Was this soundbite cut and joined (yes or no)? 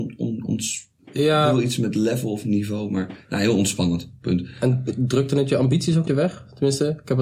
yes